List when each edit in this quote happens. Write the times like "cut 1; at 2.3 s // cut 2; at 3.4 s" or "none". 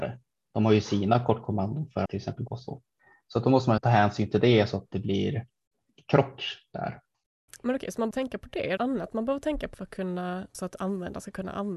cut 1; at 2.1 s // cut 2; at 2.5 s // cut 3; at 3.8 s // cut 4; at 4.9 s // cut 5; at 8.1 s // cut 6; at 8.8 s // cut 7; at 10.5 s